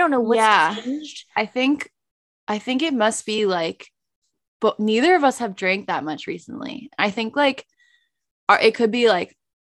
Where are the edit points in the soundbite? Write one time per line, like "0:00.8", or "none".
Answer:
none